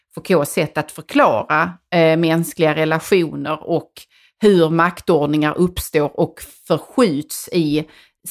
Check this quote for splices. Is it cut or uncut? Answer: uncut